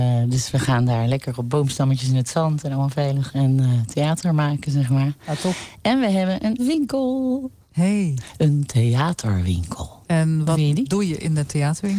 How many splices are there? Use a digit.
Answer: 2